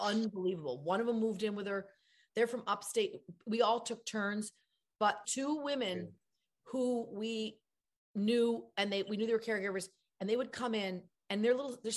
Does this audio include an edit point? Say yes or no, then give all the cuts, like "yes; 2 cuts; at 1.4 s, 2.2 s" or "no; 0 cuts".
yes; 1 cut; at 5.2 s